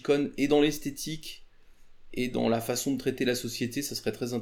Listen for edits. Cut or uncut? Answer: uncut